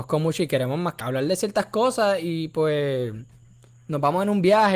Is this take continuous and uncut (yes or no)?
no